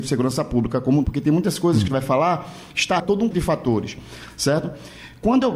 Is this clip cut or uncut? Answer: cut